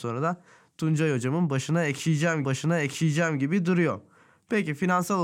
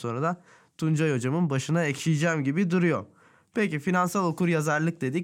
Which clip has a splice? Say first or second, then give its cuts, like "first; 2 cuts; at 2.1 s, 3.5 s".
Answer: first; 1 cut; at 2.4 s